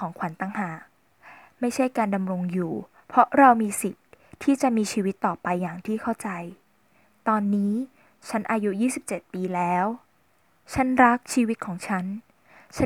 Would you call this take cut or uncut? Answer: uncut